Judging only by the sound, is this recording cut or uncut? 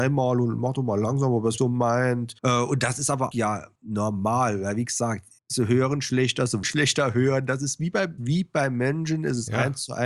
cut